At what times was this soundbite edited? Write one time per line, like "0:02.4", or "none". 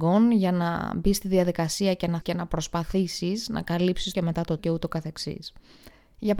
0:02.2
0:04.1
0:04.6